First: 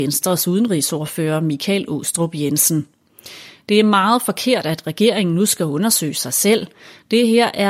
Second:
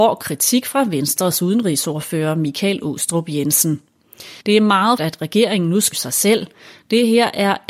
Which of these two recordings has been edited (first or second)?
second